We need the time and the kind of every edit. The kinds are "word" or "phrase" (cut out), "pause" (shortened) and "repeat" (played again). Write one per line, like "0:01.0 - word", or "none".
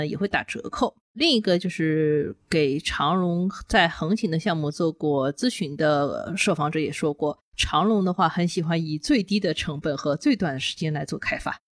0:01.0 - pause